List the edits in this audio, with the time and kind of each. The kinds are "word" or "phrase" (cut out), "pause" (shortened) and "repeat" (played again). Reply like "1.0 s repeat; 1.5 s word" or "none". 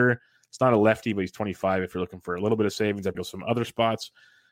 3.1 s word